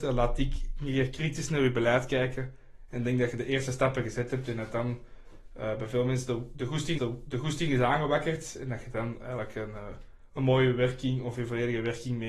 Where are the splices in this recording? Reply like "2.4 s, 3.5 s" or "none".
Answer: 7.0 s